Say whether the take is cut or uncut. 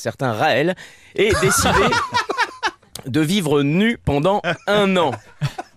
uncut